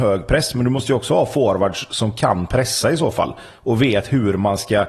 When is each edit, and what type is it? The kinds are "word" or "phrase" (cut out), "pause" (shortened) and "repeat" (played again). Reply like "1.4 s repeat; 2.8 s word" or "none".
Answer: none